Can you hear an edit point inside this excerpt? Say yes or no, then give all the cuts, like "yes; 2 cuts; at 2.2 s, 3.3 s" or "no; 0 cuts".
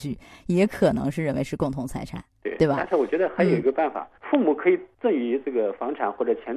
yes; 1 cut; at 4.2 s